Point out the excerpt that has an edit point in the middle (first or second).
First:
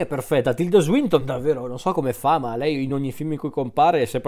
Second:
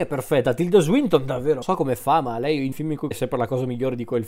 second